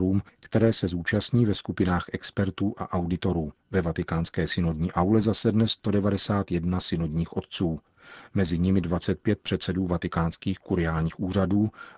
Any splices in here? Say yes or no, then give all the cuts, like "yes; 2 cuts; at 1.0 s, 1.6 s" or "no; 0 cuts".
yes; 1 cut; at 3.6 s